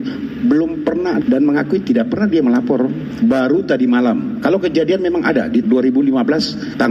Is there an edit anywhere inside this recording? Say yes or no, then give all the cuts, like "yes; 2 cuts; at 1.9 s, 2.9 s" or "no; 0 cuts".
yes; 2 cuts; at 1.2 s, 5.6 s